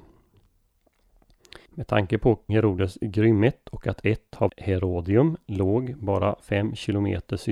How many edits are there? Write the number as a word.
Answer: three